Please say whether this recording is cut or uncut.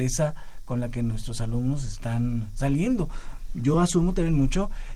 uncut